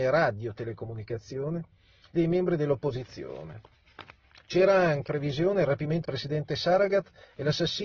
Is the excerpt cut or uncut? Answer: cut